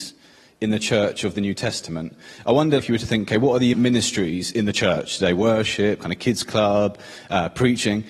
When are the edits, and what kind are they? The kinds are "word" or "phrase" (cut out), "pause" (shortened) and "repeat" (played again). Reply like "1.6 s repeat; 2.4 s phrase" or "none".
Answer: 2.8 s word; 3.7 s word